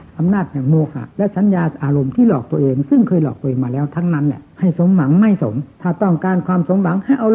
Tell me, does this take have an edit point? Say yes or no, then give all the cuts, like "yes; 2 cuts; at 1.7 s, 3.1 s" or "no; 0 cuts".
yes; 3 cuts; at 1.1 s, 4.5 s, 5.7 s